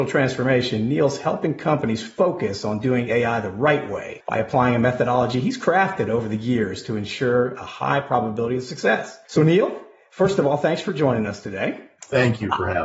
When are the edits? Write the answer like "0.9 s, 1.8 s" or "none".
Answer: none